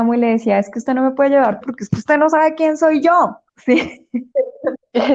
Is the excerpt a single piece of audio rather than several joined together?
no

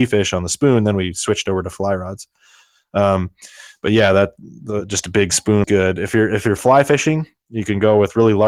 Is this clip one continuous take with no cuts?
no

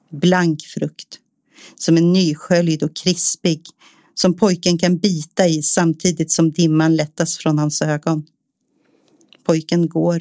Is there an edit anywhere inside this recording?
no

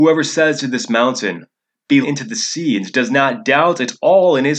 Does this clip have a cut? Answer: yes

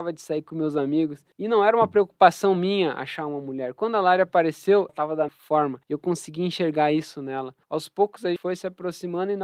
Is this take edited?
yes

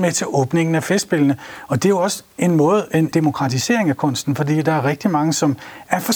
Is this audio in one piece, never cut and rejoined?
no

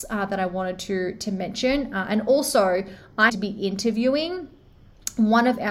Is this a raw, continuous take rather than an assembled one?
no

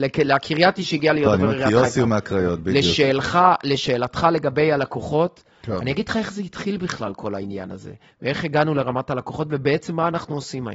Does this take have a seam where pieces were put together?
no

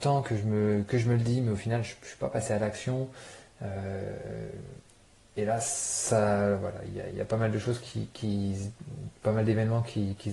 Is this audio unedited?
yes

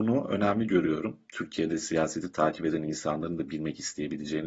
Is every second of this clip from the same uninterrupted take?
yes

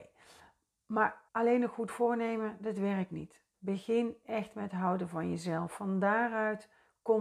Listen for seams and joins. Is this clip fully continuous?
no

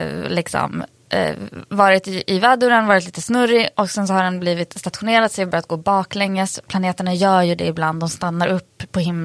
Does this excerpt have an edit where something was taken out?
no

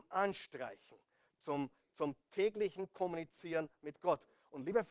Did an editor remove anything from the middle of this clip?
no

